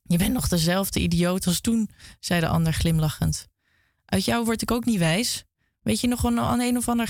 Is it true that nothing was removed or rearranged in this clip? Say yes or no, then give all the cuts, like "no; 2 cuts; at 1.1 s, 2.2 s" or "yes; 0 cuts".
yes; 0 cuts